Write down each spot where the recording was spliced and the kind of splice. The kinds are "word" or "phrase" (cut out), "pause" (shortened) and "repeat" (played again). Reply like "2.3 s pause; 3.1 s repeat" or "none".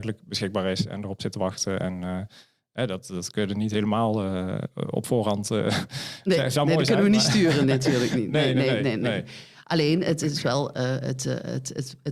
none